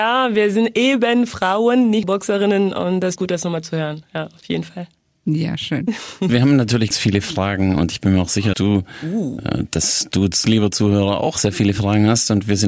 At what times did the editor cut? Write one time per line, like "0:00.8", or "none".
0:02.0
0:03.2
0:06.3
0:06.9
0:08.5